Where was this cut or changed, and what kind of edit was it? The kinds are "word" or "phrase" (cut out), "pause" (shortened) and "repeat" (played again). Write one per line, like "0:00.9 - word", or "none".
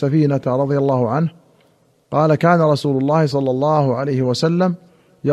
none